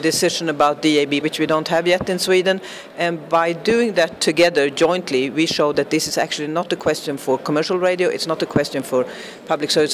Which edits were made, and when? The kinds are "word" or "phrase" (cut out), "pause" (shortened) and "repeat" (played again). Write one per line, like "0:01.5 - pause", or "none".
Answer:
0:01.2 - word